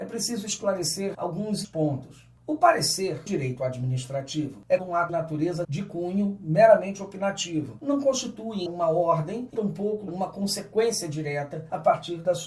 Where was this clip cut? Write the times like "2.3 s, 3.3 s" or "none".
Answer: 1.1 s, 1.6 s, 3.3 s, 4.8 s, 5.1 s, 5.6 s, 8.7 s, 9.5 s, 10.1 s